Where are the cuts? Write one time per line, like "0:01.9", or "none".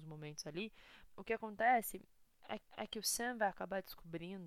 0:01.1
0:02.6